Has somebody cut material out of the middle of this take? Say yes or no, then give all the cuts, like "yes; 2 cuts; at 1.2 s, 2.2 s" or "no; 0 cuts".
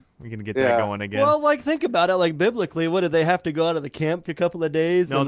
yes; 1 cut; at 4.3 s